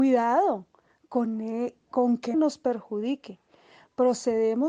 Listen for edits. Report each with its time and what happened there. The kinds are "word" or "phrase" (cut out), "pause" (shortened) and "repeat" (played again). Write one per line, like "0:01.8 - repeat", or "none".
0:02.3 - phrase